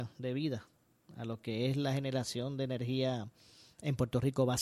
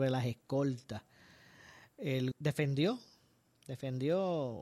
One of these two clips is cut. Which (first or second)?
second